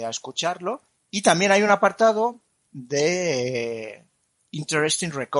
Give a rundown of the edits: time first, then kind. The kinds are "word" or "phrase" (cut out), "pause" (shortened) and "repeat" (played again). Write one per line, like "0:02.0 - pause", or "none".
none